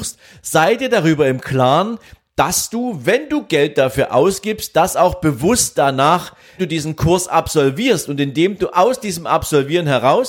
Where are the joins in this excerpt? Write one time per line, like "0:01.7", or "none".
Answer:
0:06.6